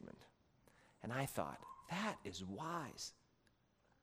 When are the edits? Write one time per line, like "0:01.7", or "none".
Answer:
none